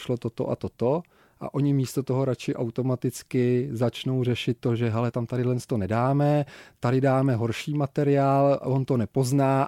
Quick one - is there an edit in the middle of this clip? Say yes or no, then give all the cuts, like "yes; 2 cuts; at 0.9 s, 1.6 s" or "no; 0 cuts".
yes; 1 cut; at 5.1 s